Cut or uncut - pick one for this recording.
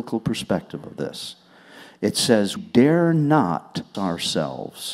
cut